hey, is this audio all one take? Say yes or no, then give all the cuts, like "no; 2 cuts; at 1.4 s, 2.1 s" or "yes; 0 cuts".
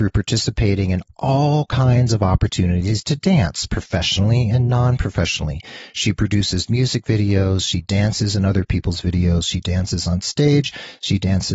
yes; 0 cuts